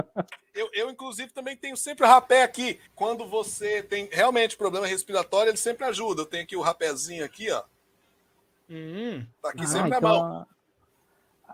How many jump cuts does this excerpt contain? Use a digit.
2